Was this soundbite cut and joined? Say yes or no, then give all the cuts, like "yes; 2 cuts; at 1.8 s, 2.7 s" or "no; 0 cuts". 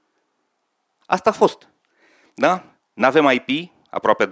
no; 0 cuts